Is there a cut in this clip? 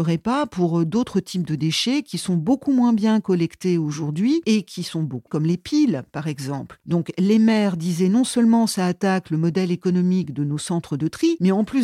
yes; 1 cut; at 5.3 s

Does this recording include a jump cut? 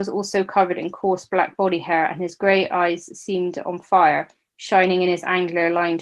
no; 0 cuts

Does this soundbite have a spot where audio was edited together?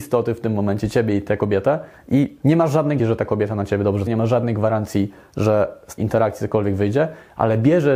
yes; 3 cuts; at 3.0 s, 4.1 s, 6.0 s

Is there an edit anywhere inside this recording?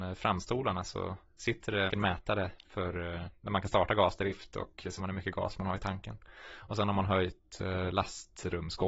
yes; 2 cuts; at 1.9 s, 5.0 s

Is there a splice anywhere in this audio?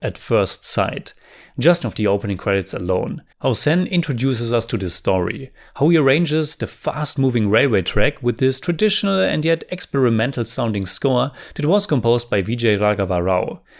yes; 1 cut; at 1.8 s

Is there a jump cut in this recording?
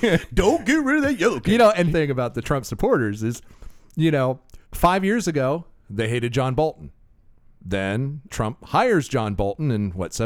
yes; 3 cuts; at 1.9 s, 4.6 s, 8.3 s

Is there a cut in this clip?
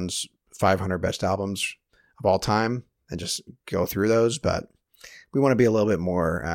no; 0 cuts

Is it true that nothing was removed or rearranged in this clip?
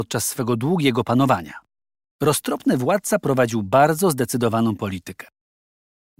yes; 0 cuts

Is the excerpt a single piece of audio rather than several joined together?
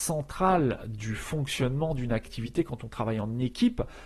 yes; 0 cuts

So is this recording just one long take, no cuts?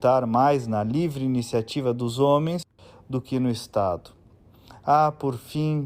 yes; 0 cuts

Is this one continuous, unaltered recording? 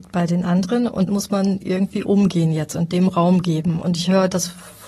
no; 1 cut; at 1.1 s

